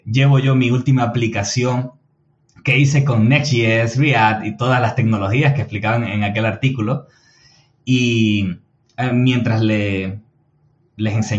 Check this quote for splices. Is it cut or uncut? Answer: uncut